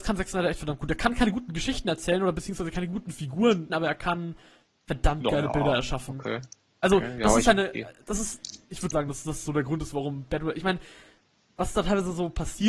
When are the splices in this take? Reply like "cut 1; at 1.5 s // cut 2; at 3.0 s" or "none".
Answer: cut 1; at 3.7 s // cut 2; at 8.9 s

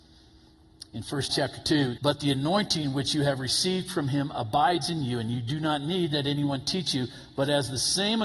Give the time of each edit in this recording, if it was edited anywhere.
cut 1; at 1.3 s // cut 2; at 2.0 s

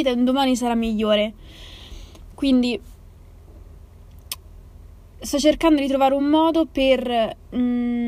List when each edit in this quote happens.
none

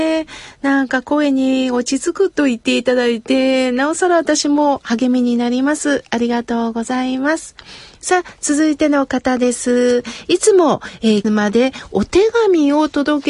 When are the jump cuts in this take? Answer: cut 1; at 11.2 s

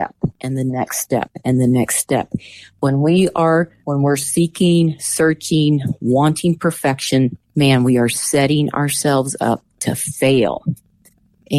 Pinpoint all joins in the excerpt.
cut 1; at 3.8 s // cut 2; at 7.4 s

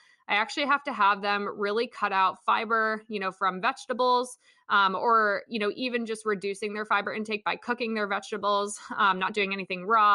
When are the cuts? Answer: none

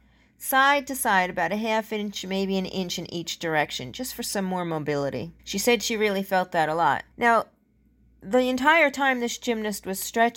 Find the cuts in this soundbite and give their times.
cut 1; at 5.4 s // cut 2; at 7.1 s

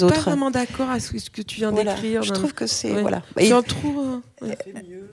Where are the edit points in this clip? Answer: cut 1; at 3.7 s

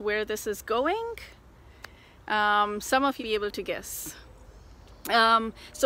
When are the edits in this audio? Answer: cut 1; at 3.2 s

